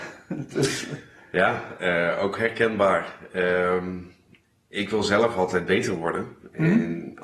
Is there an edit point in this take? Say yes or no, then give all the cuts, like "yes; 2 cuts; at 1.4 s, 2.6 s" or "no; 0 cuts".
no; 0 cuts